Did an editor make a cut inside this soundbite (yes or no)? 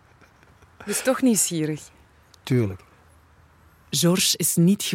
no